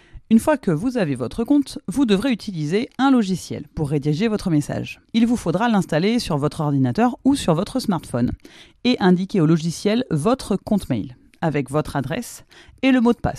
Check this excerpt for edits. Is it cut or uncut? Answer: cut